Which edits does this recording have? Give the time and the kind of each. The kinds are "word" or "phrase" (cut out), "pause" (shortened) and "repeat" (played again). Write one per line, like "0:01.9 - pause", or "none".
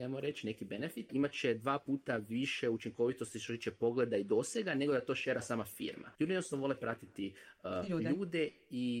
0:01.1 - word
0:06.1 - pause